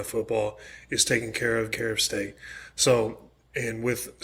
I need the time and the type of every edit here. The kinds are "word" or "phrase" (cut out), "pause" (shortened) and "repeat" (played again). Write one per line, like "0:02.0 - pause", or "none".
0:01.7 - phrase